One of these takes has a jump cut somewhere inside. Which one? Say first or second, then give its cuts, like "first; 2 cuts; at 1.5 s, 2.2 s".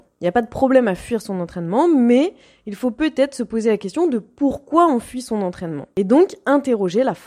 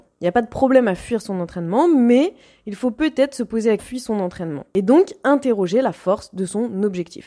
second; 1 cut; at 3.8 s